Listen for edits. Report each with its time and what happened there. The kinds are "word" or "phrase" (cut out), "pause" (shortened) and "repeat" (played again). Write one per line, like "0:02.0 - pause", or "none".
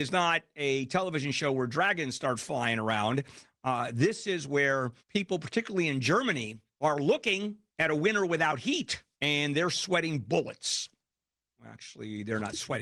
0:05.0 - pause
0:06.7 - pause
0:07.7 - pause
0:09.1 - pause